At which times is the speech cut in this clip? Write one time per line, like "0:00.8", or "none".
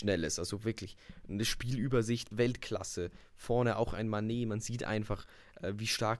0:02.3